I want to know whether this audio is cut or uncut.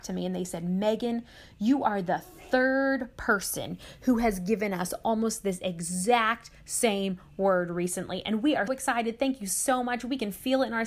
cut